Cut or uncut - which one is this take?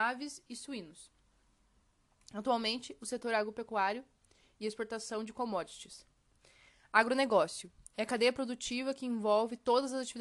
uncut